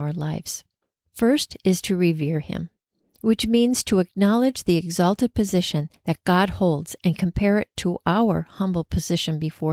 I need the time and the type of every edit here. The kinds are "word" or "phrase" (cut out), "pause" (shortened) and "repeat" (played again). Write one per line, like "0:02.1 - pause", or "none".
none